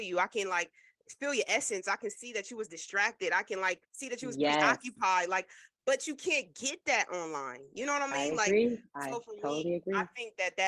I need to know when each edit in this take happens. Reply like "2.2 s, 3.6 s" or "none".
3.8 s